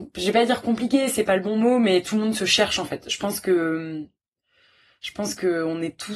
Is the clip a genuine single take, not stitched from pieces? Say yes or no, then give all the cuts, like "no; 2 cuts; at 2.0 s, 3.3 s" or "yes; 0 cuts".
yes; 0 cuts